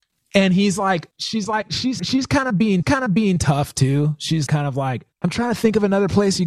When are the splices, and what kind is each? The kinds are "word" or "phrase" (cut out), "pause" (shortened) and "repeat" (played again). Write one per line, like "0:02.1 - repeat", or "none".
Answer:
0:01.1 - pause
0:02.0 - word
0:02.8 - repeat
0:04.5 - word
0:05.1 - pause